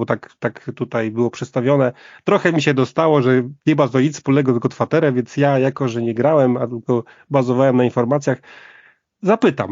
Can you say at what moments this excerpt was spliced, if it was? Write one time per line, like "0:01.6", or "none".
none